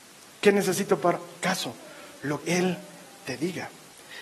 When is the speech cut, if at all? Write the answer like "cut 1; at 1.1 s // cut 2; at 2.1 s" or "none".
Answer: cut 1; at 1.4 s // cut 2; at 2.4 s